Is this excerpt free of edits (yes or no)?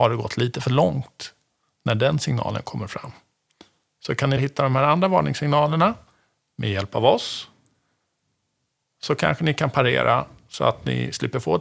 no